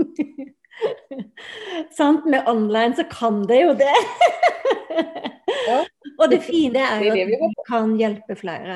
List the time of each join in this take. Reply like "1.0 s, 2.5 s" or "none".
6.7 s, 7.5 s